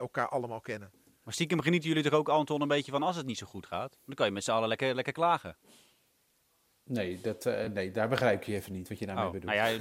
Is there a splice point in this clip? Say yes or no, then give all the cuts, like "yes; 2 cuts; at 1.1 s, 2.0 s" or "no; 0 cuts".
no; 0 cuts